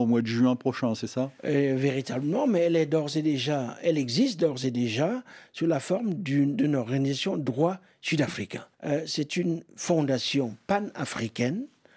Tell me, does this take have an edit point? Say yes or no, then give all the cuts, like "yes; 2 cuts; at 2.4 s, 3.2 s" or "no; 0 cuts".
yes; 2 cuts; at 1.4 s, 8.7 s